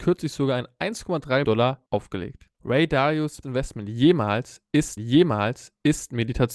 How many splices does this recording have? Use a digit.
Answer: 5